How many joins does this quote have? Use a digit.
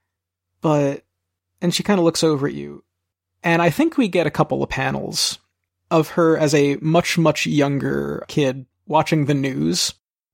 1